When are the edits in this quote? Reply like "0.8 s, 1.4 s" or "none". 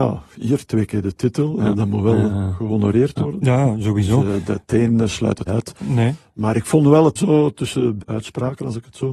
5.5 s, 7.2 s, 8.0 s